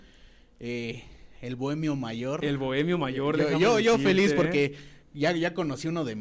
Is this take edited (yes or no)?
no